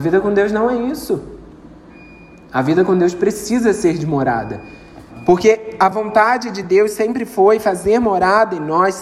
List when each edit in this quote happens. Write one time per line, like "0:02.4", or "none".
none

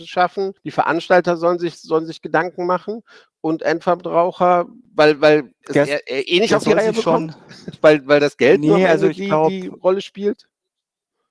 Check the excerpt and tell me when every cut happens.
none

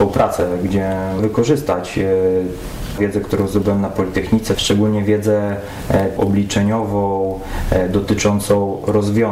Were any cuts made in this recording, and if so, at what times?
0:01.2
0:03.0
0:04.5
0:06.2

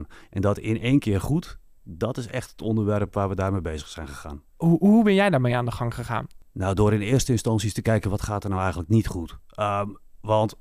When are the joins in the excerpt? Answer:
none

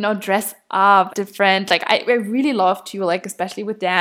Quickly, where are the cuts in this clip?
0:01.1

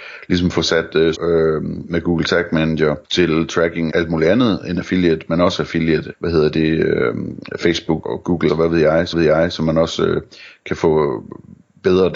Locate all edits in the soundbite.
0:01.1
0:03.0
0:03.9
0:06.1
0:08.0
0:08.5
0:09.1

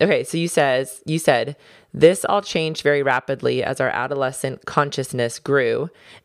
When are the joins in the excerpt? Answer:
none

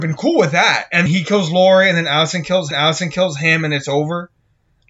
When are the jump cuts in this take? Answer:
0:01.1
0:02.7

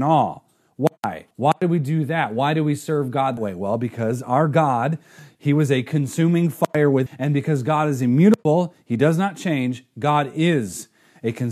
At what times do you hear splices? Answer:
0:01.3
0:03.4
0:07.1

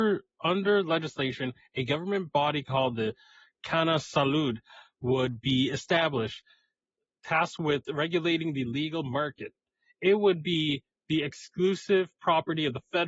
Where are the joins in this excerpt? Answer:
none

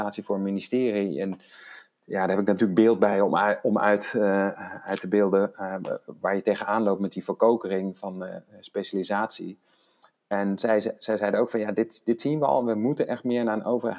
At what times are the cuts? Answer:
none

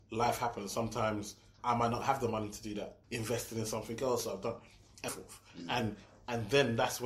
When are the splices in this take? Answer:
0:01.6
0:03.0
0:05.1

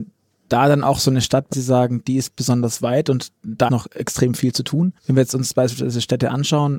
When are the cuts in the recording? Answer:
0:01.5
0:03.7
0:05.0

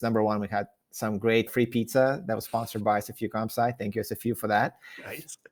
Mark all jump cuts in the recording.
0:01.5

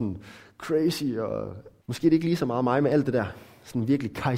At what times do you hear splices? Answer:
0:01.8

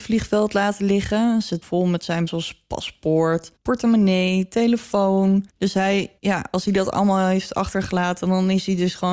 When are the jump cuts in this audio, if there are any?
0:01.6
0:02.3
0:03.6
0:05.5
0:06.2

